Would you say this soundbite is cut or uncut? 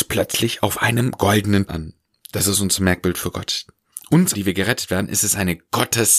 cut